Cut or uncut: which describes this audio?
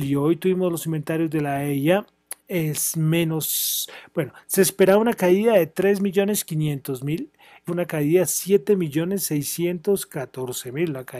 cut